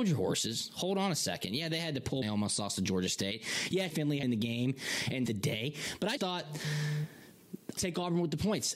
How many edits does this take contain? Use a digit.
6